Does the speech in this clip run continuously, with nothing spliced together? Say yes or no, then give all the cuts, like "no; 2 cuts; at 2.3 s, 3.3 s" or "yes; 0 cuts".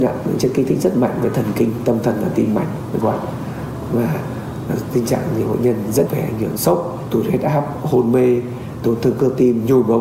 no; 3 cuts; at 3.0 s, 6.1 s, 6.6 s